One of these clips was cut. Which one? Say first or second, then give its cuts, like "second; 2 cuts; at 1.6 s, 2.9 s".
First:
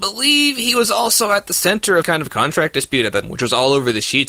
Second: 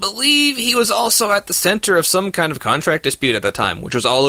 first; 2 cuts; at 2.0 s, 3.2 s